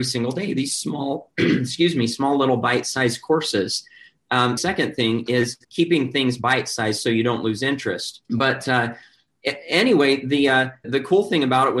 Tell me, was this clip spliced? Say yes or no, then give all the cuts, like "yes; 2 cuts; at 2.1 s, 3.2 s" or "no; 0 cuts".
yes; 4 cuts; at 4.6 s, 5.6 s, 8.2 s, 10.8 s